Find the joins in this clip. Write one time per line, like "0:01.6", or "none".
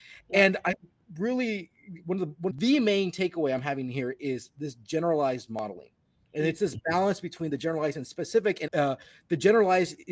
0:02.5
0:08.7